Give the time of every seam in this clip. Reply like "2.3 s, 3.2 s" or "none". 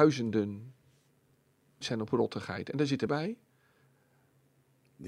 1.8 s, 3.1 s